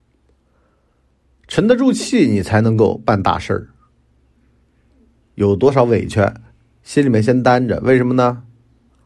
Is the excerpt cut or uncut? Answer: uncut